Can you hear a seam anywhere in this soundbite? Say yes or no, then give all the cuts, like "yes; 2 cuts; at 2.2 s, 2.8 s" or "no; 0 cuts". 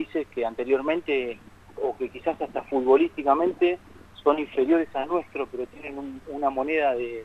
no; 0 cuts